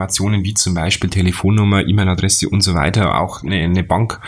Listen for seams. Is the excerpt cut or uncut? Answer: uncut